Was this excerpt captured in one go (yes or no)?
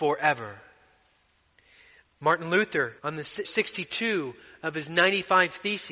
no